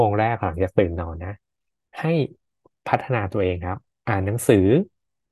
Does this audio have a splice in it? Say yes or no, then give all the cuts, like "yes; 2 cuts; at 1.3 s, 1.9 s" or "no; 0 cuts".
no; 0 cuts